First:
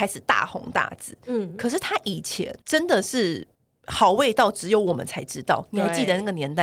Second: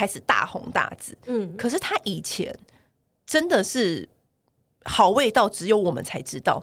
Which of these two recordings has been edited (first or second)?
first